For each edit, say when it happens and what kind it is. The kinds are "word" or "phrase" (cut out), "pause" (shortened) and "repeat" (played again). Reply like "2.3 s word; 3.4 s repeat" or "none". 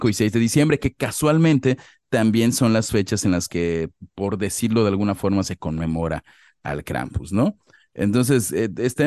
none